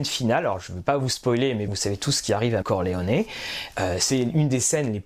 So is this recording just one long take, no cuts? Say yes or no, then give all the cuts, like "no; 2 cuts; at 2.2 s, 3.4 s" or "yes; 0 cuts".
no; 2 cuts; at 1.7 s, 2.6 s